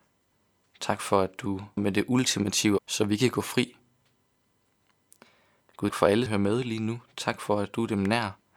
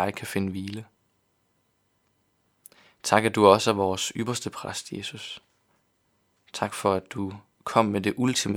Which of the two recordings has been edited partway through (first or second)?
first